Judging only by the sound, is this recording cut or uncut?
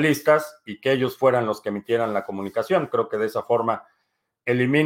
uncut